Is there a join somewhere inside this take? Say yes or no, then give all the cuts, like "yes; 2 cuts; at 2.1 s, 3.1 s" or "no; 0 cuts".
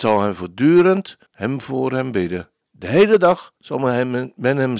yes; 3 cuts; at 1.3 s, 2.6 s, 3.6 s